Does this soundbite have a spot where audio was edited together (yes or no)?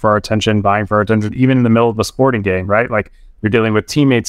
no